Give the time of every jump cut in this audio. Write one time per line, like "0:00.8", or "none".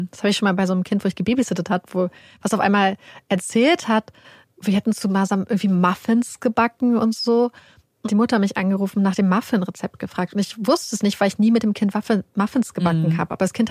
0:08.0